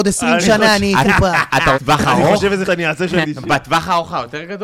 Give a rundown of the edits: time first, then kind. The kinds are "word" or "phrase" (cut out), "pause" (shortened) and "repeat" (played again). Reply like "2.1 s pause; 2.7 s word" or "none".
1.0 s word; 1.7 s word; 2.6 s word; 3.2 s phrase

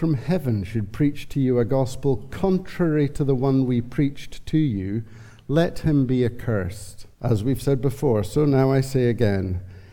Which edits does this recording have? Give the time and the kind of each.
7.1 s pause

